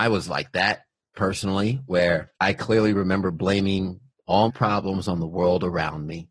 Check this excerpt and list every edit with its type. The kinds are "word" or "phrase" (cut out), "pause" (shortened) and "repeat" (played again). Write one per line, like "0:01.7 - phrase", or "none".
0:02.3 - pause
0:04.5 - word

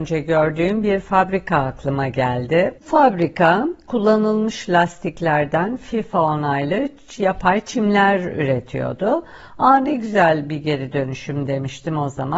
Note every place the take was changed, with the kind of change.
0:02.8 - pause

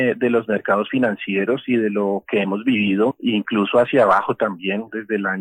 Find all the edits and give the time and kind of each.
none

